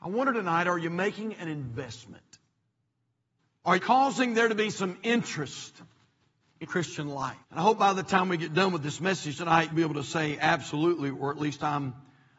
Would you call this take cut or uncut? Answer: cut